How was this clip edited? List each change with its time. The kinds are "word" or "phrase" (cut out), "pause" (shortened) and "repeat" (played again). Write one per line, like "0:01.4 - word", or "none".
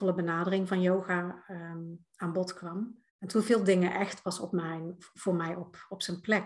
0:03.1 - pause